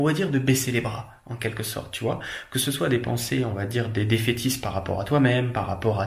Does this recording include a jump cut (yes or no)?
no